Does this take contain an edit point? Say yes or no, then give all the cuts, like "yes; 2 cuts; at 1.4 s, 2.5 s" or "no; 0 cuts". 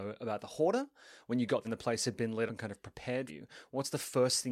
yes; 3 cuts; at 1.6 s, 2.5 s, 3.3 s